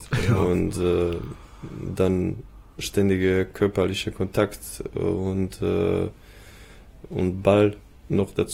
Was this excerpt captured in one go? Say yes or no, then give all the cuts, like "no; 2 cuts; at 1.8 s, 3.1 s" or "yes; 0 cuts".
yes; 0 cuts